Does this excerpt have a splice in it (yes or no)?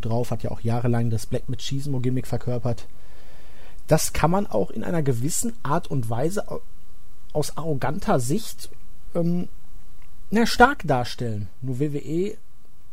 no